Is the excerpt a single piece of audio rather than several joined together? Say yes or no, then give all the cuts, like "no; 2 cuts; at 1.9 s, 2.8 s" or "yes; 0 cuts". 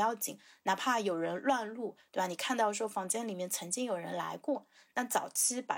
yes; 0 cuts